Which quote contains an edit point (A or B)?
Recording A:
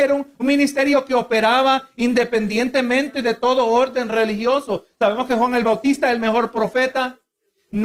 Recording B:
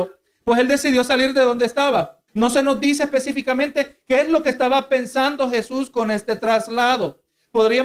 B